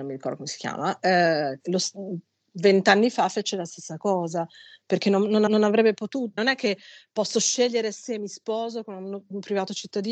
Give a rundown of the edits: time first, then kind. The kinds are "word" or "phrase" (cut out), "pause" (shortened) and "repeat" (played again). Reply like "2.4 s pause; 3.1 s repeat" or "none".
5.5 s repeat; 6.4 s word